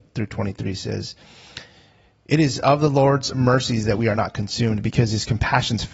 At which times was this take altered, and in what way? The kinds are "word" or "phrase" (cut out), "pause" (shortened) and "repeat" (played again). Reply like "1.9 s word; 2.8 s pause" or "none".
none